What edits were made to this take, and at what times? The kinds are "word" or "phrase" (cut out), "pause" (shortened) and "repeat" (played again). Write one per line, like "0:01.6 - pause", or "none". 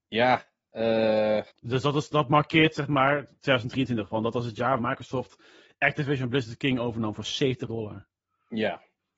0:01.5 - pause
0:04.8 - word
0:07.7 - word